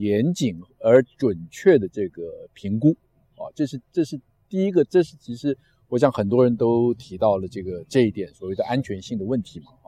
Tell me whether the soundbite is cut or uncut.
uncut